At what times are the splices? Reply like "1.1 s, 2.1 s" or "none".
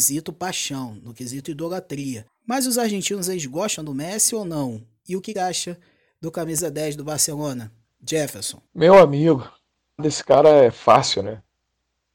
2.3 s, 5.3 s, 8.7 s, 10.0 s